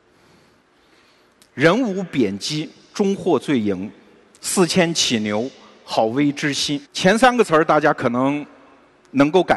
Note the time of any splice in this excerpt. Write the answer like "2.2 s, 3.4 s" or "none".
6.8 s